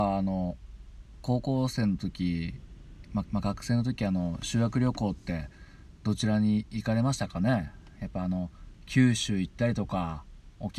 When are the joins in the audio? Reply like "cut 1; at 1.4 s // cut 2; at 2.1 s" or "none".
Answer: cut 1; at 3.2 s